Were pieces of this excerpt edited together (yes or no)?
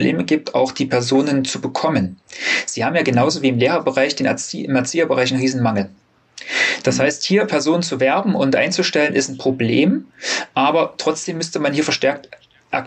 no